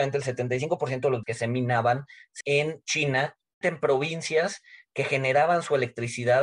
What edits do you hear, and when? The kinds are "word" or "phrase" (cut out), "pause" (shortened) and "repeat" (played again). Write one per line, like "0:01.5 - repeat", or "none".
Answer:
0:01.2 - word
0:02.4 - word
0:03.6 - word